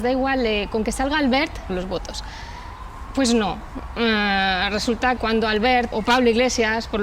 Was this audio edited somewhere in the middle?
yes; 3 cuts; at 1.7 s, 5.2 s, 5.9 s

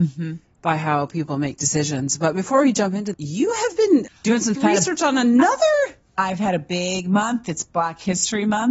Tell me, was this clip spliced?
yes; 3 cuts; at 3.1 s, 4.1 s, 4.5 s

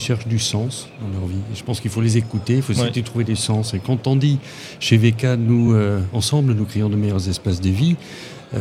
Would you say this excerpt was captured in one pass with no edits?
yes; 0 cuts

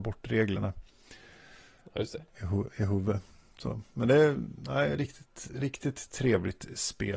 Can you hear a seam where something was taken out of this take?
no; 0 cuts

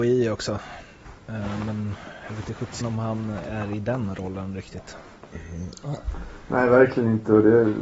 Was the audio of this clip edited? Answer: yes; 1 cut; at 2.8 s

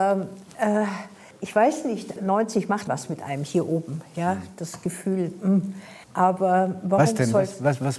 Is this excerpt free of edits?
no; 4 cuts; at 1.3 s, 2.2 s, 2.9 s, 6.0 s

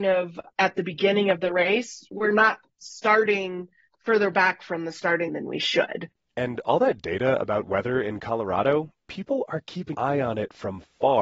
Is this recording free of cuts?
no; 2 cuts; at 5.3 s, 9.9 s

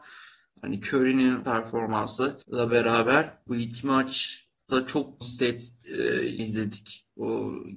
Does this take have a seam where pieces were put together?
yes; 5 cuts; at 1.4 s, 2.4 s, 3.5 s, 5.2 s, 6.4 s

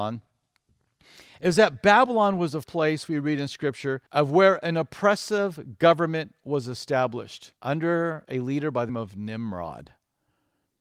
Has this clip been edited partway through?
yes; 4 cuts; at 2.6 s, 4.1 s, 7.6 s, 8.9 s

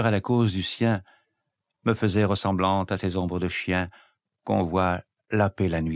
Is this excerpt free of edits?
yes; 0 cuts

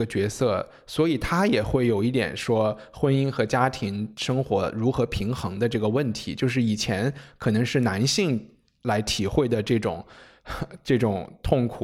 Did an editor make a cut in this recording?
no; 0 cuts

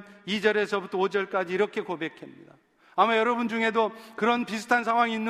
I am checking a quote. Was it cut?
no; 0 cuts

